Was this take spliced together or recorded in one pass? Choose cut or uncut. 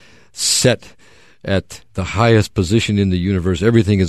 uncut